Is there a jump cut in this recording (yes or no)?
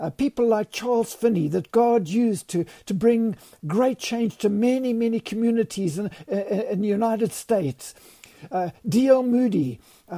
no